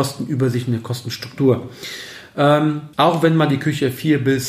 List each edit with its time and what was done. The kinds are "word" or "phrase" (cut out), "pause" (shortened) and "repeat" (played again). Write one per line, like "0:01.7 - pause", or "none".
0:02.9 - pause